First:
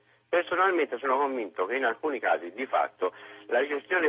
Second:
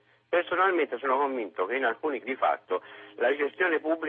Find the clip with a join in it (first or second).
second